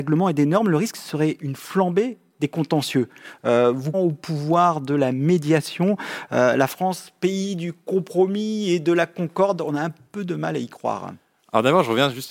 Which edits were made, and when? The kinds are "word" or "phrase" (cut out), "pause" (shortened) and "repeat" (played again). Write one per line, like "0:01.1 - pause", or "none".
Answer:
0:03.9 - phrase